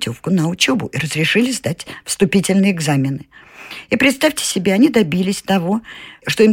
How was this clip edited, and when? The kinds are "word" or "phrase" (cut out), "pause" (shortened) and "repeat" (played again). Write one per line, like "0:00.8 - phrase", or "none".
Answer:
none